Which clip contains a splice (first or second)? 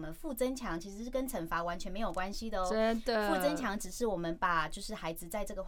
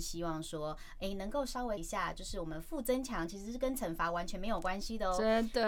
second